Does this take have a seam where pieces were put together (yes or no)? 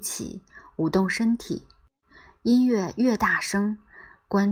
no